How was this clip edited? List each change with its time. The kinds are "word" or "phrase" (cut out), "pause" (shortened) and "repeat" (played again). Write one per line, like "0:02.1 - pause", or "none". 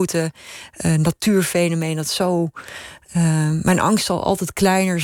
none